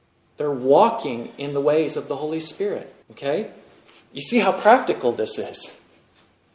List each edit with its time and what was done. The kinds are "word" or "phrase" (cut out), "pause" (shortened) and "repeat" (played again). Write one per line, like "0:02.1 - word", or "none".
0:03.0 - pause